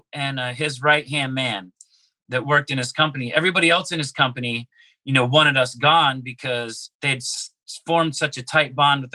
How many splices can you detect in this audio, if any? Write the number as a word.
one